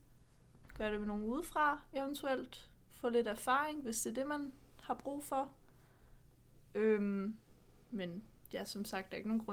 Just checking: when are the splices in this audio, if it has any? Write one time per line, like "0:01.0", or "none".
none